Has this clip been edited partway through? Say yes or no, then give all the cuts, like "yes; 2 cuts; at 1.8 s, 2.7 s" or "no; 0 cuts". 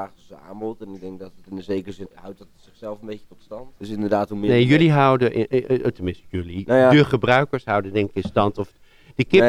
yes; 2 cuts; at 2.0 s, 3.8 s